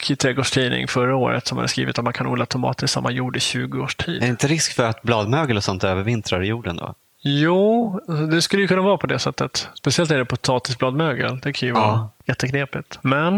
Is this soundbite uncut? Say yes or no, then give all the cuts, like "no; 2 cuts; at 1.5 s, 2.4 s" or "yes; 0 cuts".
yes; 0 cuts